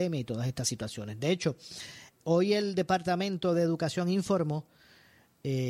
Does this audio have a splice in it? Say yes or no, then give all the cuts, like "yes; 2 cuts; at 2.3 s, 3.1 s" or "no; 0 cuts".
no; 0 cuts